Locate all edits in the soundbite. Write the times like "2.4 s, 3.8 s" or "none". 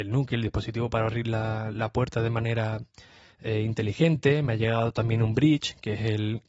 none